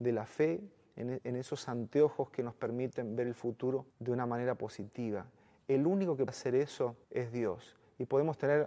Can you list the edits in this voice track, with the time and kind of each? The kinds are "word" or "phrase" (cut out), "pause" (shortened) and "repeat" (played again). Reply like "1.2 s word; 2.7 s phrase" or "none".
3.9 s pause; 6.3 s word; 7.0 s pause